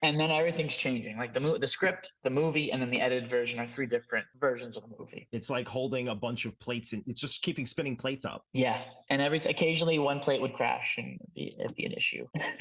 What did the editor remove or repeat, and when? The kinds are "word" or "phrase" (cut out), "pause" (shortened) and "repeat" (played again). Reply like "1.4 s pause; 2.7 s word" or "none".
none